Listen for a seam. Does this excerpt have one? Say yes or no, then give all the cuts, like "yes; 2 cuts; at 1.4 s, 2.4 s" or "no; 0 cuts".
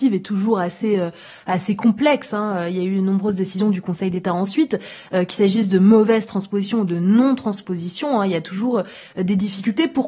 no; 0 cuts